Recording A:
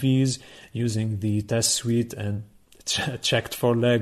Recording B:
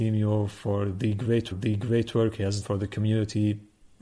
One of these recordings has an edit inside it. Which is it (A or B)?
B